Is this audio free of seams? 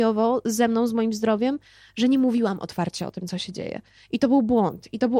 yes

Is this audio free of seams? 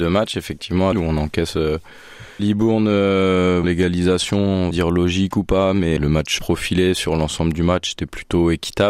no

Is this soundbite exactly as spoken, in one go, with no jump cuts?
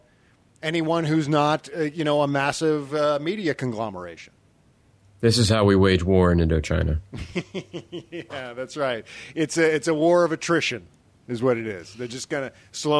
yes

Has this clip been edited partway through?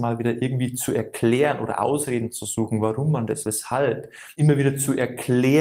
yes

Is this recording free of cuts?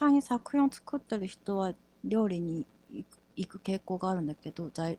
yes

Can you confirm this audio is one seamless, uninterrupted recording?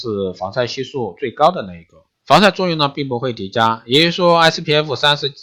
no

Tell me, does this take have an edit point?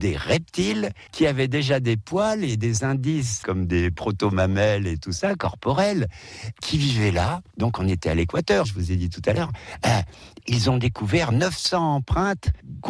yes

